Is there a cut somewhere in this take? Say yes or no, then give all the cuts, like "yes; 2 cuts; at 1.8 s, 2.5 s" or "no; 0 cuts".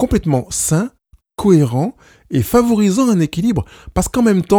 no; 0 cuts